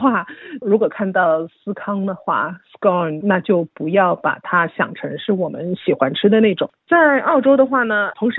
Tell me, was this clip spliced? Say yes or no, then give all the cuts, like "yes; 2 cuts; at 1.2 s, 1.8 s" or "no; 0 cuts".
yes; 1 cut; at 3.2 s